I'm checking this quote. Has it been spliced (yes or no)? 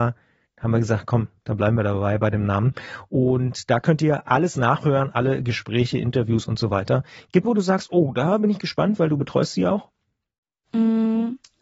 yes